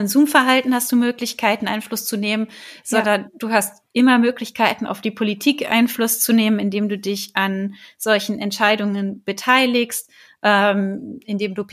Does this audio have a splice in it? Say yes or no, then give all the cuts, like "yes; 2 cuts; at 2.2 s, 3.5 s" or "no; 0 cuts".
no; 0 cuts